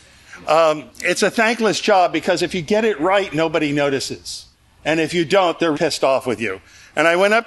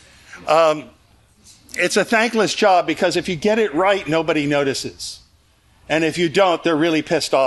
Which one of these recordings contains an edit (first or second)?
first